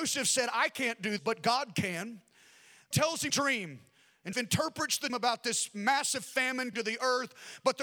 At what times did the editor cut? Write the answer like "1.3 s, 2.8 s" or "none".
1.2 s, 2.9 s, 3.3 s, 4.3 s, 5.1 s, 6.7 s